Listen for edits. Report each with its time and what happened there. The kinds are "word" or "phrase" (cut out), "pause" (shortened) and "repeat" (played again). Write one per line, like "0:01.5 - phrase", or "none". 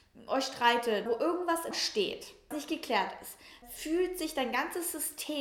0:01.1 - word
0:01.7 - word
0:02.5 - word
0:03.6 - word